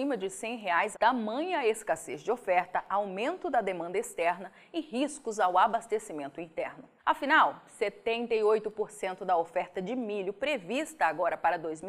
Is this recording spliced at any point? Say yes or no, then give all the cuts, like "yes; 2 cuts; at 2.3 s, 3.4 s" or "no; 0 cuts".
yes; 2 cuts; at 0.9 s, 7.0 s